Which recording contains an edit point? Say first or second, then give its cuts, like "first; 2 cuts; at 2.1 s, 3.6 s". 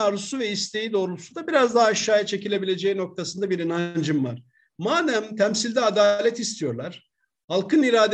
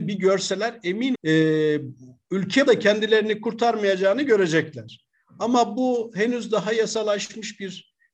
second; 2 cuts; at 1.1 s, 2.7 s